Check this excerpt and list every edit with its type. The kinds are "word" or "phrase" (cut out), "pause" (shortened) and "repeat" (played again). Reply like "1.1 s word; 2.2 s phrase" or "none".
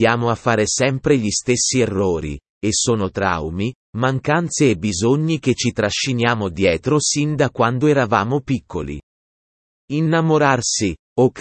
none